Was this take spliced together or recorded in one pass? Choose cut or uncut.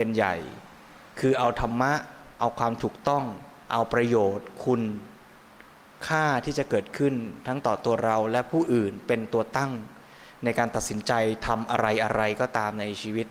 cut